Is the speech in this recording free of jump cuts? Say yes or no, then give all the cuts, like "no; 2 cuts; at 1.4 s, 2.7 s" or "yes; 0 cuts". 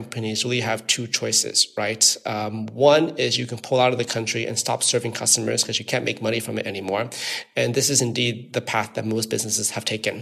yes; 0 cuts